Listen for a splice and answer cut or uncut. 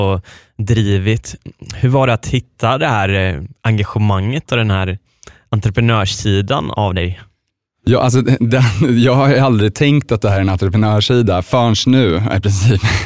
uncut